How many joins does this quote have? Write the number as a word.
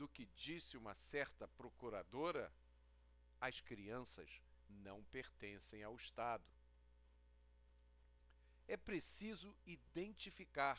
one